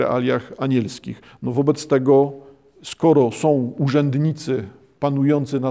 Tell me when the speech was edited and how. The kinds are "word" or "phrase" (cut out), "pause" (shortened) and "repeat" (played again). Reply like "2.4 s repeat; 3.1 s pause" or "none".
none

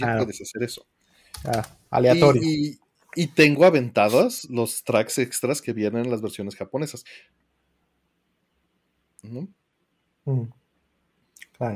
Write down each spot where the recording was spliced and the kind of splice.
none

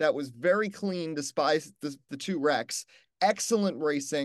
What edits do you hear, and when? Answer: 2.1 s word

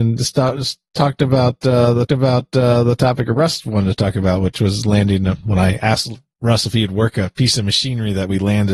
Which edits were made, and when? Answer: 2.1 s repeat; 5.4 s word

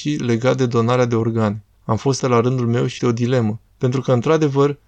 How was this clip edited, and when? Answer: 1.7 s pause; 2.2 s word; 3.0 s word; 3.7 s pause

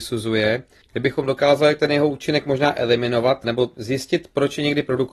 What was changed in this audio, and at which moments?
none

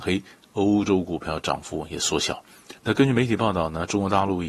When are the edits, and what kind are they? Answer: 2.8 s pause

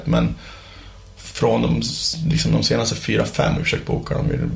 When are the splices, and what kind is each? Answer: 3.6 s word

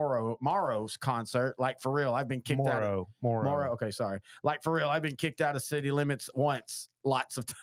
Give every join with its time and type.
6.3 s word

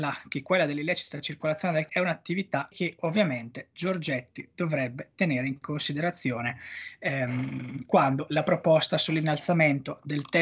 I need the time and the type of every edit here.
1.9 s word; 2.7 s phrase

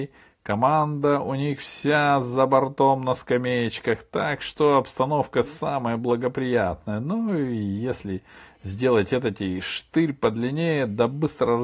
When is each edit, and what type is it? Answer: none

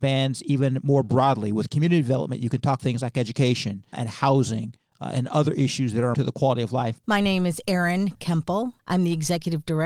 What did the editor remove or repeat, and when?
2.8 s word; 3.9 s word; 6.1 s word

